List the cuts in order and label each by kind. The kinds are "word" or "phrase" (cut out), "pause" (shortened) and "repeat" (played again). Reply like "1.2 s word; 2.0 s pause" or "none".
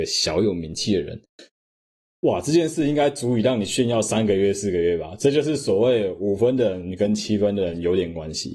none